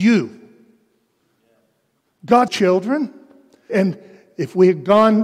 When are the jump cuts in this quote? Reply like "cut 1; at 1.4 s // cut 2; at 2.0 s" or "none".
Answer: cut 1; at 2.5 s // cut 2; at 3.7 s